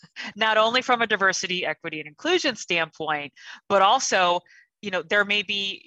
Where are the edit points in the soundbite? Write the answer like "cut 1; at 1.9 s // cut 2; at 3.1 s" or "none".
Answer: none